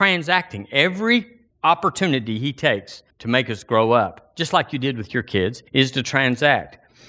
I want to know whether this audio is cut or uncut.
cut